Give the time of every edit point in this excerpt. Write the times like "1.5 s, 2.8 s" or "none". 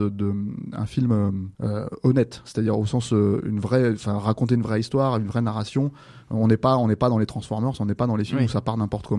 1.5 s